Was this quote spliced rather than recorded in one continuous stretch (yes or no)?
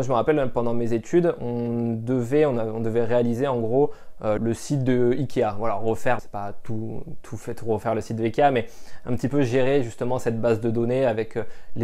yes